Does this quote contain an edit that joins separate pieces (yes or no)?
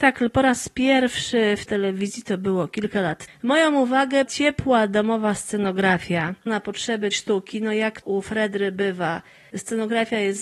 yes